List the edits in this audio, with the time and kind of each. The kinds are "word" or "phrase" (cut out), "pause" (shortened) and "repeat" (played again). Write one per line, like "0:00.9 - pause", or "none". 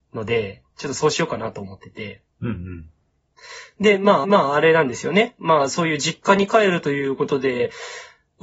0:02.3 - pause
0:04.2 - repeat